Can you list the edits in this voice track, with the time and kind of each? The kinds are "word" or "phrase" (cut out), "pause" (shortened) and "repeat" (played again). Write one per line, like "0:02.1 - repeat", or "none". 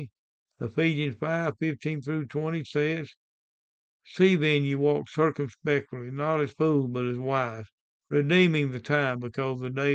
none